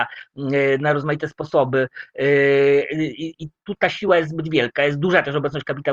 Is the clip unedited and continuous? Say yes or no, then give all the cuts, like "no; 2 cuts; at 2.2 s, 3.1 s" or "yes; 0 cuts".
yes; 0 cuts